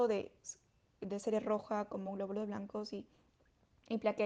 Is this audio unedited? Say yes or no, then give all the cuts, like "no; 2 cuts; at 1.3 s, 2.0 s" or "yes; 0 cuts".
yes; 0 cuts